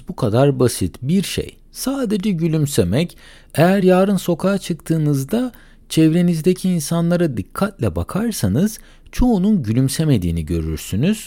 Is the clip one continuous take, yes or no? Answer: yes